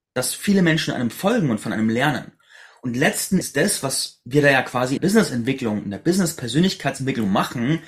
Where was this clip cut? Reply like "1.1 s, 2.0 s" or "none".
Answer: 3.4 s, 5.0 s